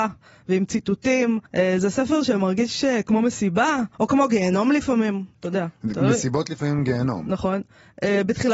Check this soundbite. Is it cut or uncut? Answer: cut